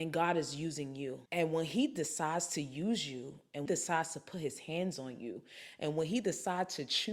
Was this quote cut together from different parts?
yes; 2 cuts; at 1.3 s, 3.7 s

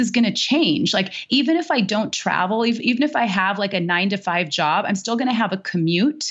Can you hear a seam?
no; 0 cuts

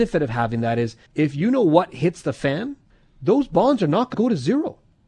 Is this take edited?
yes; 3 cuts; at 1.1 s, 2.9 s, 4.1 s

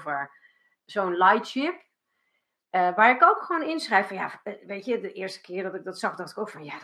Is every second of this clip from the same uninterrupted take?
yes; 0 cuts

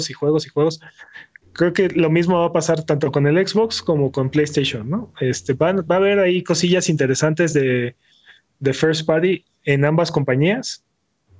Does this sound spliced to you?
no; 0 cuts

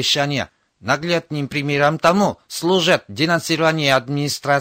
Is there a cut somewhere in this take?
no; 0 cuts

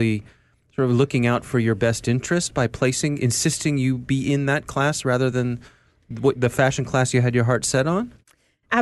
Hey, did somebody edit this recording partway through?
no; 0 cuts

